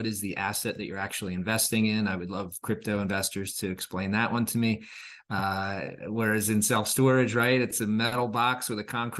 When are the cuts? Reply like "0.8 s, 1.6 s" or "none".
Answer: none